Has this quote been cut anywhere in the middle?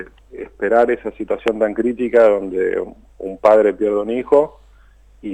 no; 0 cuts

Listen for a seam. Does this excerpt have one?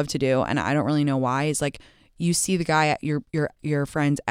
no; 0 cuts

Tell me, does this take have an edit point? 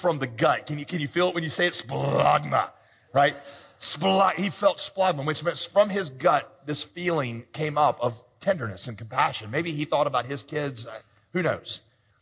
no; 0 cuts

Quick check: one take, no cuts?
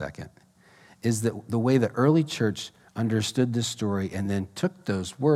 yes; 0 cuts

